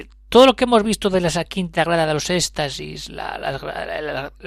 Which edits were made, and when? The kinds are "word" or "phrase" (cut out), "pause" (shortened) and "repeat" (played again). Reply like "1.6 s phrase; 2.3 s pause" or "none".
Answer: none